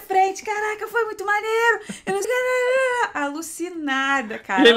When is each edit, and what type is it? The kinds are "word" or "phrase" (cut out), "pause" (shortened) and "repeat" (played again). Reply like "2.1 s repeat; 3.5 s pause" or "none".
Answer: 2.2 s word

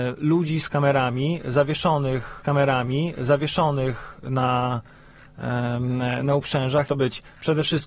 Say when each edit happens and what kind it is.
2.4 s repeat; 6.9 s phrase

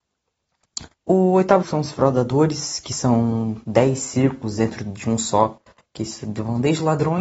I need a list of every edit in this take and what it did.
0.9 s pause; 1.6 s word

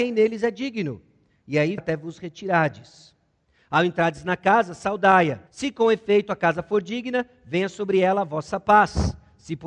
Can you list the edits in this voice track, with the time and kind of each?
1.8 s word; 5.5 s pause

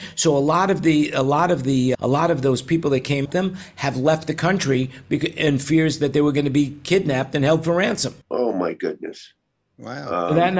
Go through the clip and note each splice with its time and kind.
1.9 s word; 3.3 s phrase; 8.2 s pause

